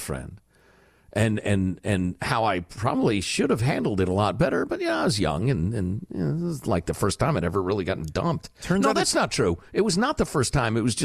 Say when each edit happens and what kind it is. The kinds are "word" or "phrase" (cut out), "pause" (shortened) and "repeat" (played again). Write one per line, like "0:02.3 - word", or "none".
none